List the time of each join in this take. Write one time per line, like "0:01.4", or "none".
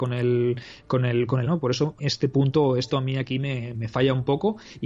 0:01.5
0:02.0
0:02.9
0:03.7